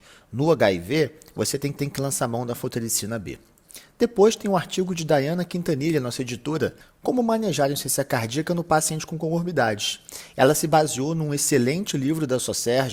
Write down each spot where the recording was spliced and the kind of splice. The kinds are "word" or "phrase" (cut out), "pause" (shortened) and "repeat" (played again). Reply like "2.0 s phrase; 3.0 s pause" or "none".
1.8 s repeat